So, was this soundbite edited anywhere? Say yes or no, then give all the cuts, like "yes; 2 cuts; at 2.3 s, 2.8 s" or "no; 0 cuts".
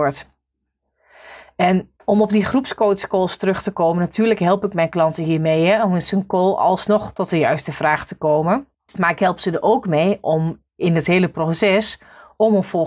yes; 3 cuts; at 2.0 s, 8.7 s, 10.7 s